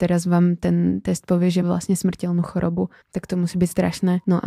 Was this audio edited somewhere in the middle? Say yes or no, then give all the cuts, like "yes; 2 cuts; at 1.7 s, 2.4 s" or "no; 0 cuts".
yes; 2 cuts; at 1.6 s, 3.0 s